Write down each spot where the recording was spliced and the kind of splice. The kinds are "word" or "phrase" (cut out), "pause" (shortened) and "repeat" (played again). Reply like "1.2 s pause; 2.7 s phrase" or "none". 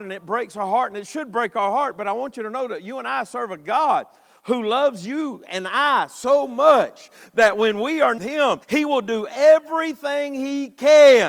8.2 s phrase; 8.6 s pause